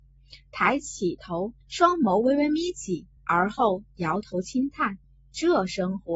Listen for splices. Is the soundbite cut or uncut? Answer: cut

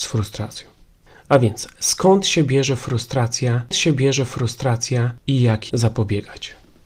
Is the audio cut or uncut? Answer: cut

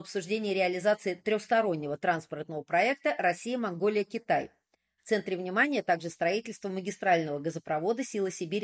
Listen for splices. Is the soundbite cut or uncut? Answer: uncut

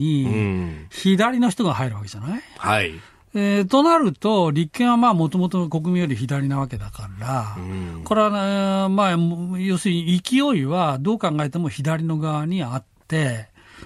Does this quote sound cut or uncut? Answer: uncut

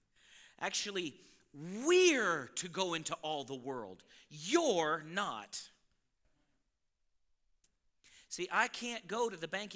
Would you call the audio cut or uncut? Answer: uncut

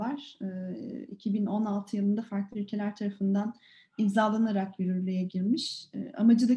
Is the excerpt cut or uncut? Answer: uncut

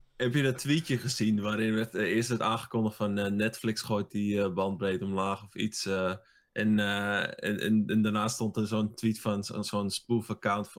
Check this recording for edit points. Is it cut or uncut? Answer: uncut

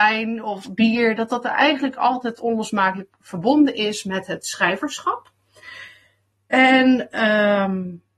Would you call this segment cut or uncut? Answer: uncut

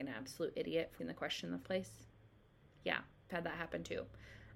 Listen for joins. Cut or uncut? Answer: cut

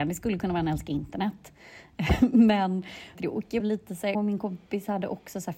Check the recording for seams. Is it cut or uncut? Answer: cut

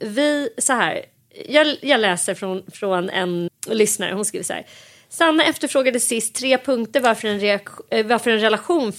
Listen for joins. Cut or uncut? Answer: cut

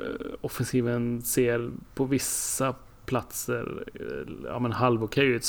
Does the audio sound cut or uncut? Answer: uncut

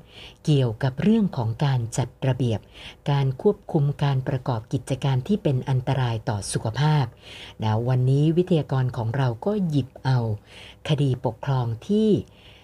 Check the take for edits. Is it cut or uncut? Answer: uncut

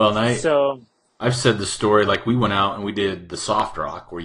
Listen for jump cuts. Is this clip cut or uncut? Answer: uncut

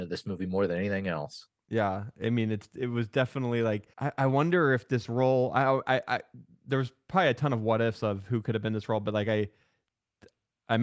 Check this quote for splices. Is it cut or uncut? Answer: cut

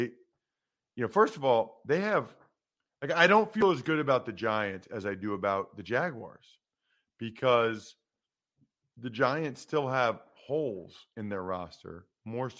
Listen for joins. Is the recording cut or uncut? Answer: uncut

